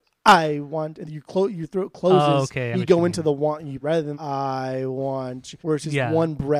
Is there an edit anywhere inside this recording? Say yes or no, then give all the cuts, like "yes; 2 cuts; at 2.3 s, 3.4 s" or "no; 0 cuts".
yes; 5 cuts; at 1.1 s, 2.7 s, 3.8 s, 4.1 s, 5.6 s